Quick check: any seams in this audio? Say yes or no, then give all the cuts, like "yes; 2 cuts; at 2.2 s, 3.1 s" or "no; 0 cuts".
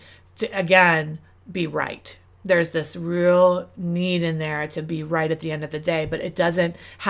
no; 0 cuts